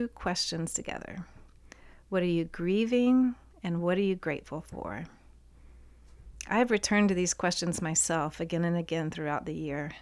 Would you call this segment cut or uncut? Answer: uncut